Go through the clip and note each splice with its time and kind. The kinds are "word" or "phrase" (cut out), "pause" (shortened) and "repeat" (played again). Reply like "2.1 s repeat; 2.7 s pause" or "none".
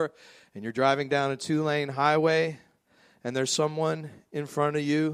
none